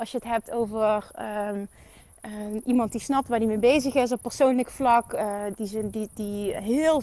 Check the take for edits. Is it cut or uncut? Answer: uncut